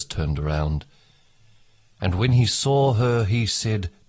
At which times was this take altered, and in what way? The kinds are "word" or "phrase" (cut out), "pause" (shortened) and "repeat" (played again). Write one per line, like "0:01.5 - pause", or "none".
none